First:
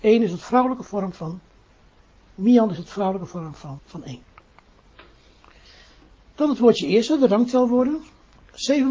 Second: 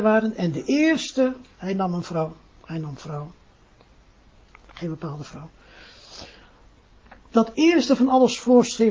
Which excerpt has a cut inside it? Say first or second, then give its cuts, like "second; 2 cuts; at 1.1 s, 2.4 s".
first; 1 cut; at 3.8 s